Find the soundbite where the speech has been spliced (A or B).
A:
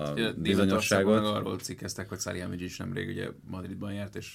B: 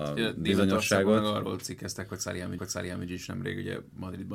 B